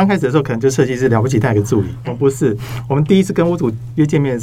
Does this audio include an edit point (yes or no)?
yes